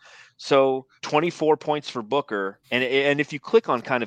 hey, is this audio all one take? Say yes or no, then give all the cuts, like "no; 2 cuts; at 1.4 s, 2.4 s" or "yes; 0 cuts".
no; 2 cuts; at 1.0 s, 2.6 s